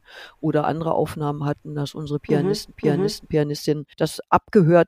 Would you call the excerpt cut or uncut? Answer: cut